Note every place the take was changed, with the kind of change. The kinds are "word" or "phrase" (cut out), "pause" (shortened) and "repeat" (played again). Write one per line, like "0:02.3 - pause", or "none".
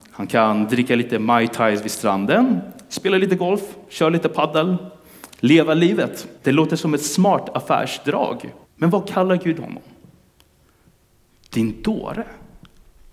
0:06.4 - pause
0:08.6 - pause